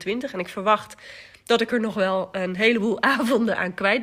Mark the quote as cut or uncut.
uncut